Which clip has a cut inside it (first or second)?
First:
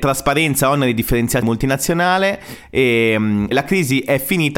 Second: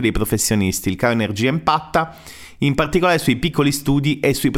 first